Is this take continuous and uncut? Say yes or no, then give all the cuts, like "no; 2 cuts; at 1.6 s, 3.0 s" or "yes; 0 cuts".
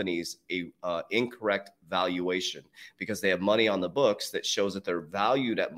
yes; 0 cuts